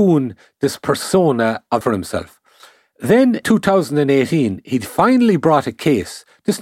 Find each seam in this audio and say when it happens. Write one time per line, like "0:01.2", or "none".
0:01.8
0:03.4